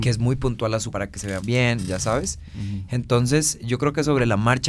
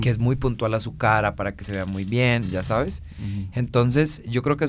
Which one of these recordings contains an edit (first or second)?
first